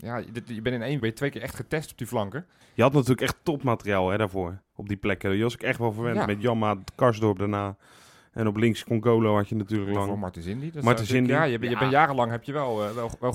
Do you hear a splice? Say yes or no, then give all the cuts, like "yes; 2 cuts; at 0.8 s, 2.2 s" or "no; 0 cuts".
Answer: yes; 2 cuts; at 1.0 s, 2.6 s